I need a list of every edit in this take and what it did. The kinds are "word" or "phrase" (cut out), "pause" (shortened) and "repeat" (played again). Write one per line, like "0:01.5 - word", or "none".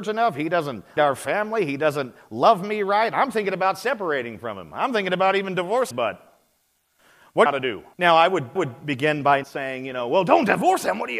0:01.0 - word
0:05.9 - word
0:07.5 - phrase
0:07.9 - pause
0:08.6 - repeat
0:09.4 - word